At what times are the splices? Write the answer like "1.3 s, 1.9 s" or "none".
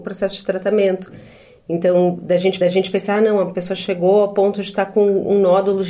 2.6 s

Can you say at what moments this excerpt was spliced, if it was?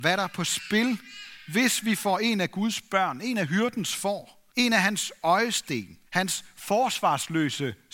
4.5 s, 6.1 s

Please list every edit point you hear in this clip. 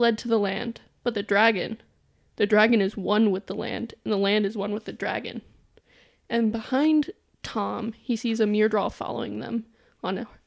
none

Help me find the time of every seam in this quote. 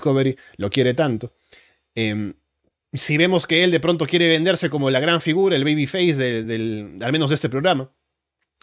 none

